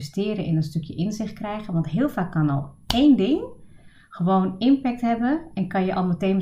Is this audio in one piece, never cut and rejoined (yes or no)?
yes